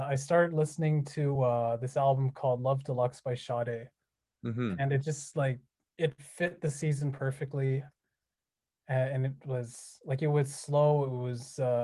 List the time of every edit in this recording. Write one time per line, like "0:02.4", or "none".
none